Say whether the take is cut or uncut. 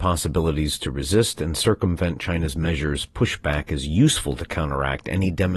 uncut